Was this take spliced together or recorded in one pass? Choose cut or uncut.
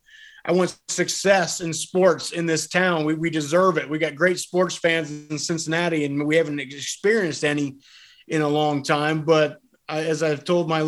uncut